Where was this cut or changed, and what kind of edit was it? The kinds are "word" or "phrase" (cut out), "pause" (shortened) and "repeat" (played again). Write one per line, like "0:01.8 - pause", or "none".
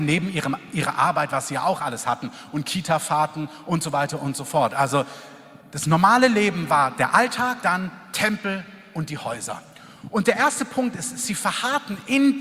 0:05.6 - pause
0:07.6 - word